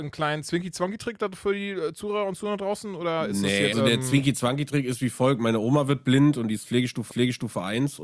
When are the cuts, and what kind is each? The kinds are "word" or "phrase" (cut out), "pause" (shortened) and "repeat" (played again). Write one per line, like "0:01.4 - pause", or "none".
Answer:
0:03.7 - word
0:07.1 - repeat